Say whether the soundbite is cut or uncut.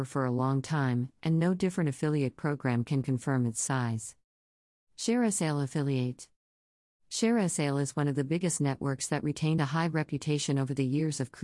uncut